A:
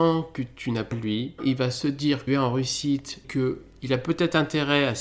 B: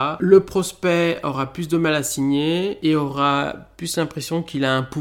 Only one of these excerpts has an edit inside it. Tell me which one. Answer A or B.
A